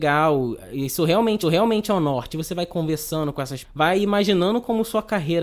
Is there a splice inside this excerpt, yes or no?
yes